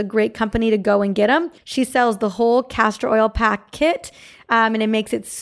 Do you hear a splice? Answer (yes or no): no